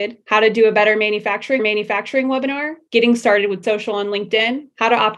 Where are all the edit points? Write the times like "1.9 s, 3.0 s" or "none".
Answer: 1.6 s, 3.6 s